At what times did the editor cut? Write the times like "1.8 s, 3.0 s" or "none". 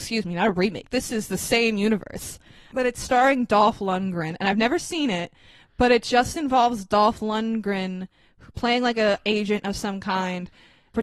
none